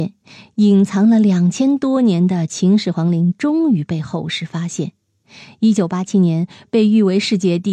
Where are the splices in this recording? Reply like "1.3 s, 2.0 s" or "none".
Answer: none